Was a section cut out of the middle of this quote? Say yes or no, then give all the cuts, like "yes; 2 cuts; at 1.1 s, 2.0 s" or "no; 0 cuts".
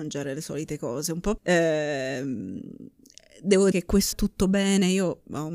yes; 3 cuts; at 1.4 s, 3.7 s, 4.1 s